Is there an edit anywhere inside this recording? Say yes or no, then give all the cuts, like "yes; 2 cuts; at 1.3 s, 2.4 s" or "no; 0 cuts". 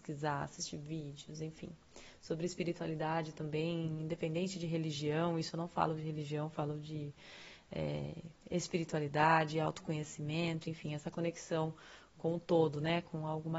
no; 0 cuts